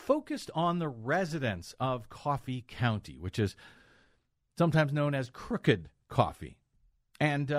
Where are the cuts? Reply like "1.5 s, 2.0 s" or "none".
none